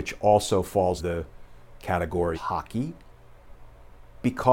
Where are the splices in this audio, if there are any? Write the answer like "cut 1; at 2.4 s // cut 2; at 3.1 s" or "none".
cut 1; at 1.0 s // cut 2; at 2.3 s